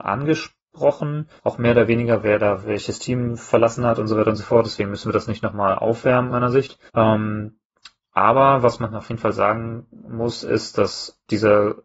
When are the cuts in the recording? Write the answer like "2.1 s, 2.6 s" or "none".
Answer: 1.4 s, 2.6 s, 6.3 s, 6.9 s